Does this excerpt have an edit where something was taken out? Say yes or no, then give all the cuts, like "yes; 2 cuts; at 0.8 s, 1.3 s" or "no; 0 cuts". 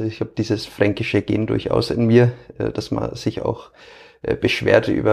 no; 0 cuts